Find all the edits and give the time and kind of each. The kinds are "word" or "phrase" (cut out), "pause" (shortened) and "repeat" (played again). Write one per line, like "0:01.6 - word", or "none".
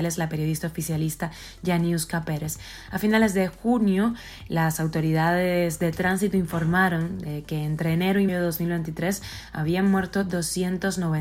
0:08.3 - word